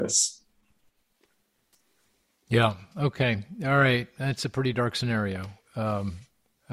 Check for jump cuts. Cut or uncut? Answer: uncut